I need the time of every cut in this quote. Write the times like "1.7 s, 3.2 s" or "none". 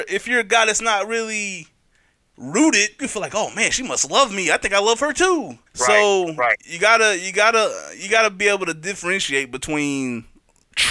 3.0 s, 5.7 s